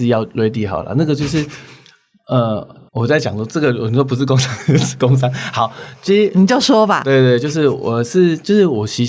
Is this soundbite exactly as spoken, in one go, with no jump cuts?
no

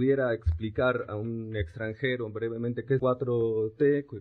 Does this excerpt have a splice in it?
yes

